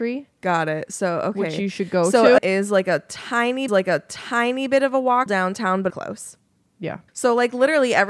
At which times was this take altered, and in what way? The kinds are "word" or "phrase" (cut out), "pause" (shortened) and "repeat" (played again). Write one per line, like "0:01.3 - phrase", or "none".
0:02.4 - phrase
0:03.7 - repeat
0:05.3 - phrase
0:05.9 - phrase
0:07.1 - pause